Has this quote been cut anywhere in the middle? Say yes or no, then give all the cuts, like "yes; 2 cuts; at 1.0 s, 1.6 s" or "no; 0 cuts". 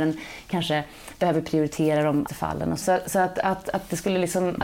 yes; 2 cuts; at 2.3 s, 2.8 s